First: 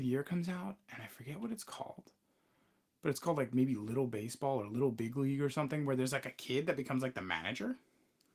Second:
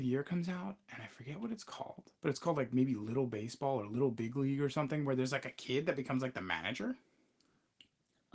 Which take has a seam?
second; 1 cut; at 2.2 s

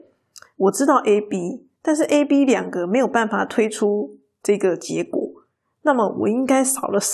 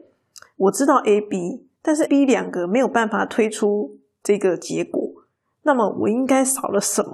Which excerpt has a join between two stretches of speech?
second; 1 cut; at 2.1 s

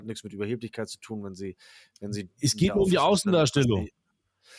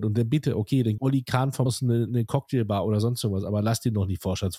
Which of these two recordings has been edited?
second; 3 cuts; at 1.0 s, 1.7 s, 2.1 s

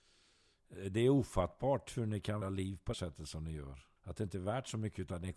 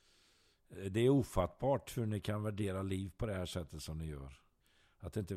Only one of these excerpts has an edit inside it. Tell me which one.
first; 3 cuts; at 2.4 s, 2.9 s, 4.0 s

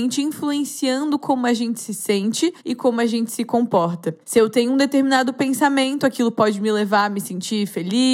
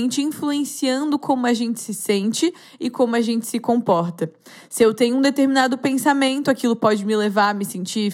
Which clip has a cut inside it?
first; 2 cuts; at 2.6 s, 4.2 s

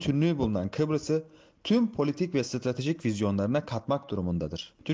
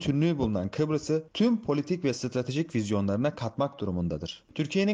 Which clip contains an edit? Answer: second; 1 cut; at 1.3 s

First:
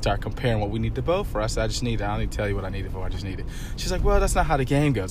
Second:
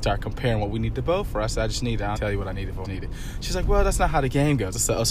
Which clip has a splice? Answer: second; 2 cuts; at 2.2 s, 2.8 s

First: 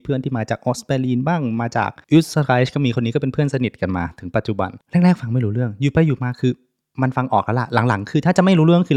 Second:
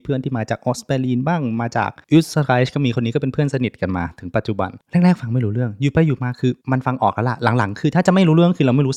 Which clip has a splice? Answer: second; 1 cut; at 6.6 s

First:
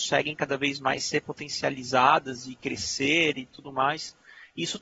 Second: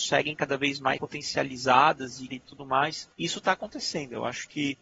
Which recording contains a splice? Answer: second; 3 cuts; at 1.0 s, 2.3 s, 3.1 s

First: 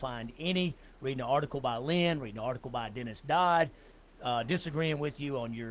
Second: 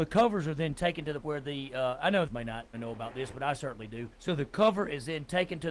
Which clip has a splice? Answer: second; 4 cuts; at 1.2 s, 2.3 s, 2.7 s, 4.1 s

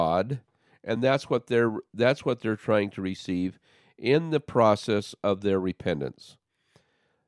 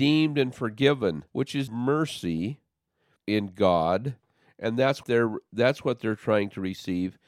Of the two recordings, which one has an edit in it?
second; 4 cuts; at 1.3 s, 1.7 s, 3.2 s, 5.0 s

